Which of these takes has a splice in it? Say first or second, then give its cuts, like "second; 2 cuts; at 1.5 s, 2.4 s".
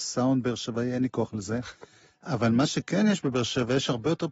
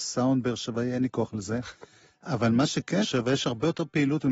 second; 1 cut; at 3.0 s